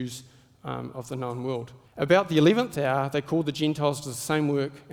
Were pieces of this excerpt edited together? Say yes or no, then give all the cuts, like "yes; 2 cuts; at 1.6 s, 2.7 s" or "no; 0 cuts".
yes; 1 cut; at 1.8 s